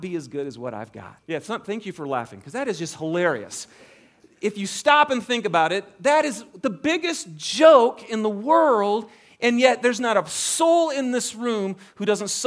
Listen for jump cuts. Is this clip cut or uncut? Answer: cut